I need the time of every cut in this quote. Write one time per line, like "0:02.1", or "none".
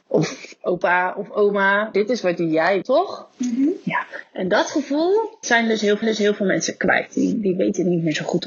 0:01.9
0:02.8
0:05.4
0:06.0